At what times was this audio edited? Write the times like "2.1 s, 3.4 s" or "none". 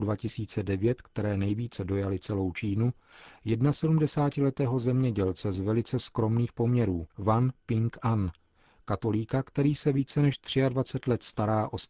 7.1 s